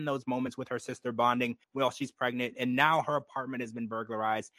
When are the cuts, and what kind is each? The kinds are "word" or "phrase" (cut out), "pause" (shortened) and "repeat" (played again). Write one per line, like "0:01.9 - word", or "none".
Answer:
0:01.6 - pause